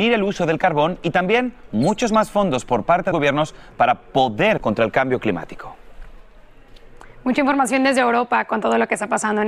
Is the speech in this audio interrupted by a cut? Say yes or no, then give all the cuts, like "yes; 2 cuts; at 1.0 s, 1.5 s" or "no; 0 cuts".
yes; 2 cuts; at 3.1 s, 4.6 s